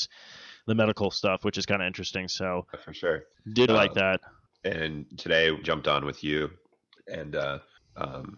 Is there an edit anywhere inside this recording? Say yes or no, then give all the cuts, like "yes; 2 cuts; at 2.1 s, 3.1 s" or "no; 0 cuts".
yes; 3 cuts; at 2.7 s, 3.7 s, 5.6 s